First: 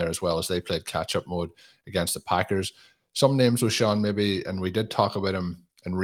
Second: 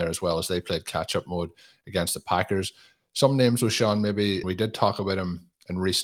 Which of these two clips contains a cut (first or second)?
second